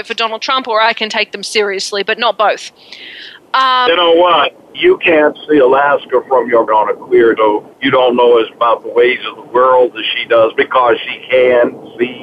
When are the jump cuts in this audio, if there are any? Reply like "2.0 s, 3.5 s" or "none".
3.9 s, 4.7 s, 6.7 s, 7.4 s, 7.7 s, 8.5 s